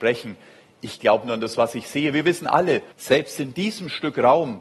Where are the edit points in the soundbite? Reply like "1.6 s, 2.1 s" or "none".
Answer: 2.9 s